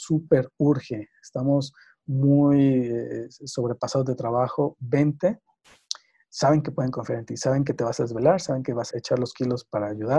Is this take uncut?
no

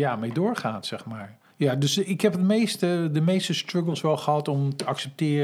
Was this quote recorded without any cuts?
no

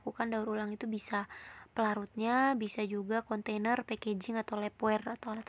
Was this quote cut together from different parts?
no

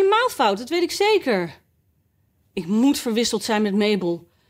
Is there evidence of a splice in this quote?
no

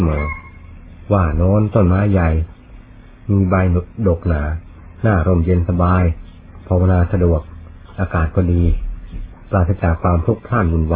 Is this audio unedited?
yes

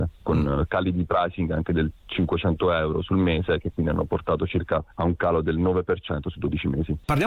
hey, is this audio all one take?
no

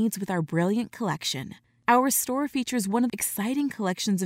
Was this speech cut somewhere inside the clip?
yes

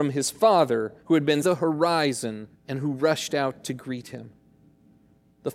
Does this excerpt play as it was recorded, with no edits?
no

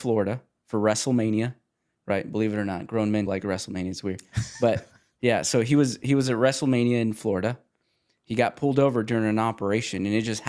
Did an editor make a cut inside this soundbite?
yes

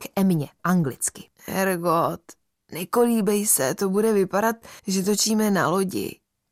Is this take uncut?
no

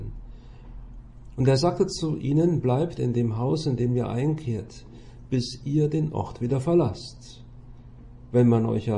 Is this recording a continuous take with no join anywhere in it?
yes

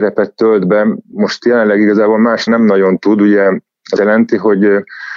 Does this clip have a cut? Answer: yes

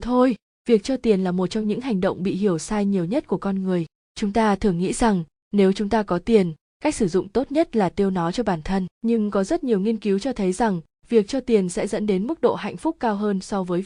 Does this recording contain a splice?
yes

